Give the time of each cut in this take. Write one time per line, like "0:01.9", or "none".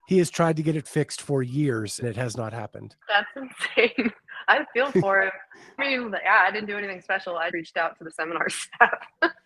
0:02.0
0:03.0
0:05.8
0:07.5